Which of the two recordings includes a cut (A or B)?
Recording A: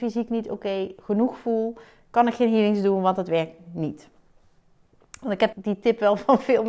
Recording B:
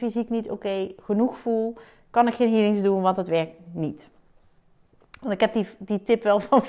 A